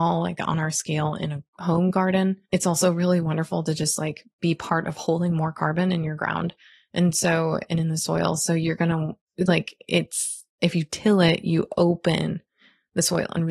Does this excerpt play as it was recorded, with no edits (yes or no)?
yes